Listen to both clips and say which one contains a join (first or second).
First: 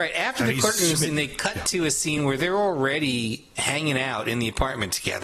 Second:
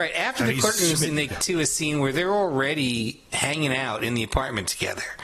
second